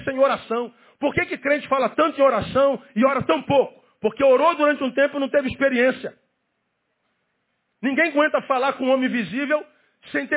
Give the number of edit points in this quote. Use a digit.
0